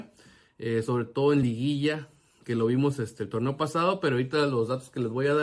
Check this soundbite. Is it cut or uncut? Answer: uncut